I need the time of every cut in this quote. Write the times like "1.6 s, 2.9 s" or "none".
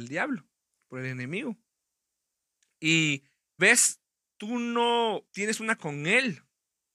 3.6 s, 5.3 s, 5.8 s